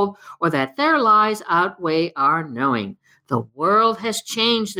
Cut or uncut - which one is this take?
uncut